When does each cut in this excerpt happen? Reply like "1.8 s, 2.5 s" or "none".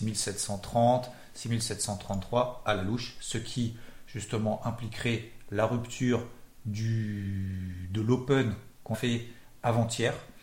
8.9 s

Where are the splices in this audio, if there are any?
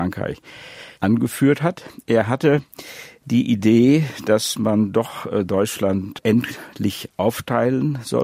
0.9 s

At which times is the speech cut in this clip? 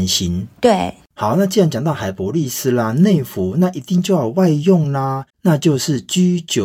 5.3 s

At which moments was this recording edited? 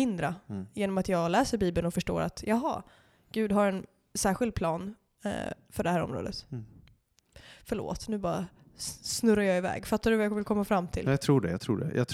none

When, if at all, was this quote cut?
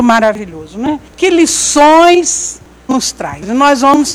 1.1 s, 2.9 s

